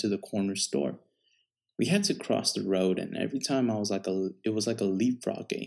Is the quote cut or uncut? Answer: uncut